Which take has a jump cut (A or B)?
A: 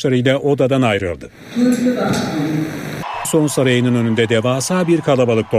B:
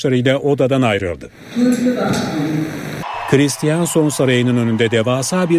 A